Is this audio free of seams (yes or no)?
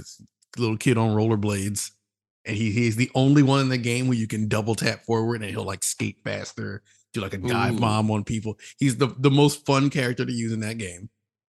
yes